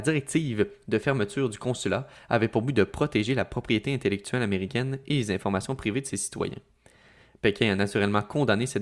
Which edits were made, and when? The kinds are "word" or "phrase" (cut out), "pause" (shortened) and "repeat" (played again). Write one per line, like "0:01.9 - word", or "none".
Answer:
none